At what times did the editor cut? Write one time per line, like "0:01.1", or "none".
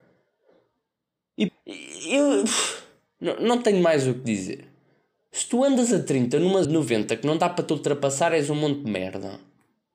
0:01.5
0:06.6